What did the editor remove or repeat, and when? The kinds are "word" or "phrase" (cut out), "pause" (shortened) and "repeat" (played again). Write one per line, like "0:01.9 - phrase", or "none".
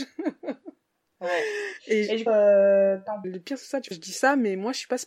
0:02.3 - phrase
0:03.2 - phrase
0:03.9 - word